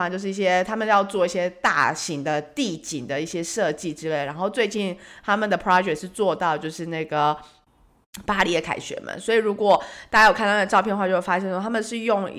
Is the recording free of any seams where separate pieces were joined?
yes; 0 cuts

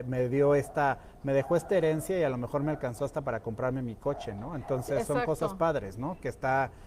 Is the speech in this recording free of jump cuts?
yes; 0 cuts

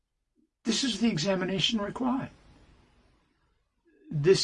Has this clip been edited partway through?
no; 0 cuts

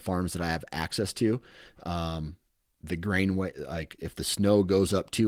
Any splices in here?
no; 0 cuts

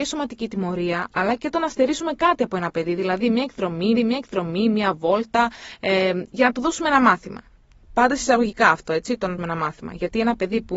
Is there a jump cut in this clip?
yes; 2 cuts; at 4.0 s, 9.4 s

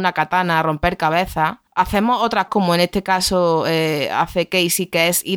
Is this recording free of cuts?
no; 2 cuts; at 1.7 s, 2.5 s

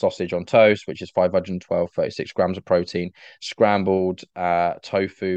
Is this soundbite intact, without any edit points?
yes; 0 cuts

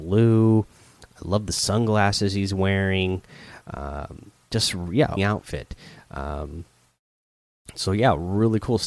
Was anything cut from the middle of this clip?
yes; 1 cut; at 5.2 s

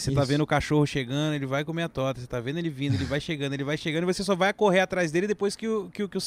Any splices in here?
no; 0 cuts

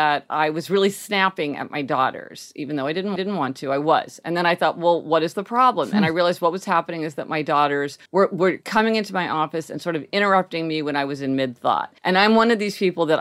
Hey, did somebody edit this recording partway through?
yes; 3 cuts; at 3.2 s, 8.1 s, 12.0 s

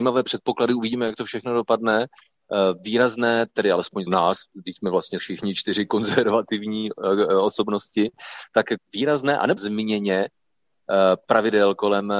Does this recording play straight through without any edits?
no; 4 cuts; at 4.1 s, 5.2 s, 8.8 s, 9.6 s

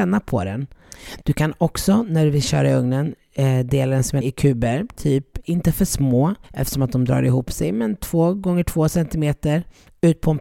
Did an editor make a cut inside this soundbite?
yes; 3 cuts; at 4.2 s, 5.4 s, 6.4 s

